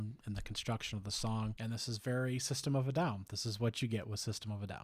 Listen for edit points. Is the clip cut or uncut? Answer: uncut